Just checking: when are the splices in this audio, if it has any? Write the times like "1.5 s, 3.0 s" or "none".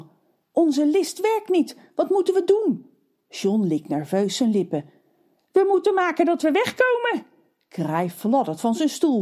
none